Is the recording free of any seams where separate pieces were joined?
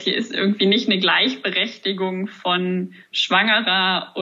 yes; 0 cuts

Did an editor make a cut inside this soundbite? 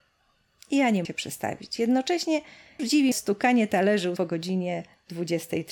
yes; 4 cuts; at 1.0 s, 2.8 s, 3.1 s, 4.2 s

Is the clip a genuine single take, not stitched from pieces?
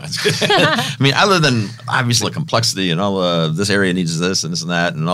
no; 1 cut; at 2.2 s

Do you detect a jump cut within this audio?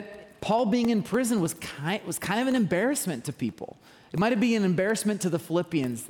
no; 0 cuts

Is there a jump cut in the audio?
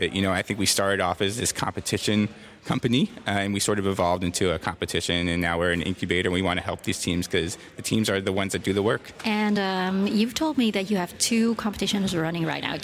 no; 0 cuts

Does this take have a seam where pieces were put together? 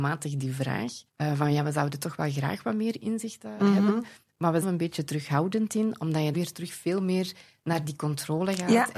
yes; 3 cuts; at 1.1 s, 4.6 s, 6.3 s

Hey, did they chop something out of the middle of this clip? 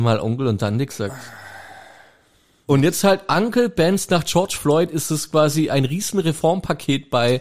no; 0 cuts

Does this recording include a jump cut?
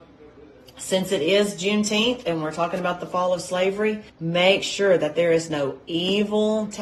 yes; 1 cut; at 4.1 s

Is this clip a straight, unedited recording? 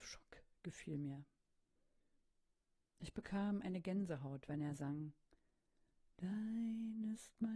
yes; 0 cuts

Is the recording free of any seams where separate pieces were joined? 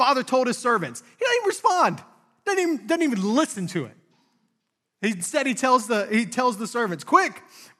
yes; 0 cuts

